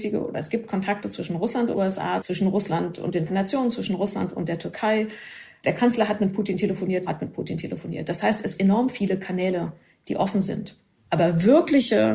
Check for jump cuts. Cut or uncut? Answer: cut